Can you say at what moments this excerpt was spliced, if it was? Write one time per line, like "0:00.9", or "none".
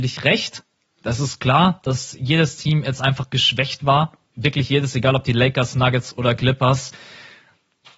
none